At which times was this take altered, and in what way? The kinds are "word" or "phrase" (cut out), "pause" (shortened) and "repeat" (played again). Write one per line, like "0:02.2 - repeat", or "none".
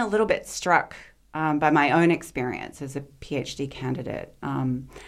none